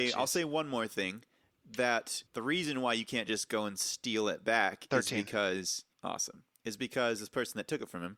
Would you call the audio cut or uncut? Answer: cut